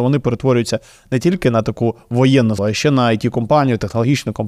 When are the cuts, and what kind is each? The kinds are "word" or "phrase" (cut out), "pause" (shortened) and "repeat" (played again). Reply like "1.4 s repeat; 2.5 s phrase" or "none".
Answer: 2.6 s word